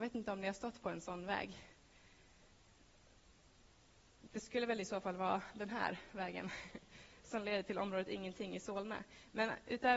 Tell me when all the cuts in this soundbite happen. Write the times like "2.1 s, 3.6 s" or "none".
none